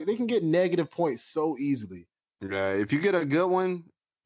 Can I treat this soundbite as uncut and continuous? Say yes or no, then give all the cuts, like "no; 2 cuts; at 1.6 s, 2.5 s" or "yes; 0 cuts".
yes; 0 cuts